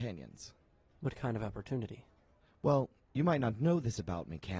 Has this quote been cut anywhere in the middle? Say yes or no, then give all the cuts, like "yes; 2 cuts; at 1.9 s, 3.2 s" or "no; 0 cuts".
no; 0 cuts